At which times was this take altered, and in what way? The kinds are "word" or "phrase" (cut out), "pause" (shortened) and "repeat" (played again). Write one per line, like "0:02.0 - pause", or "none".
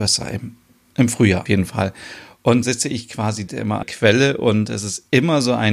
0:01.5 - word
0:02.6 - word
0:03.5 - word
0:03.8 - word